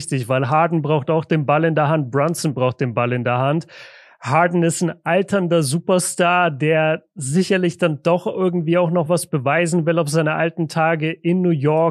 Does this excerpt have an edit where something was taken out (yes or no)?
no